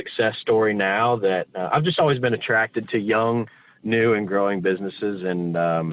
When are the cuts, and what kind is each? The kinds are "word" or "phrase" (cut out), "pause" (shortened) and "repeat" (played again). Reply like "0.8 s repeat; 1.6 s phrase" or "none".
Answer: none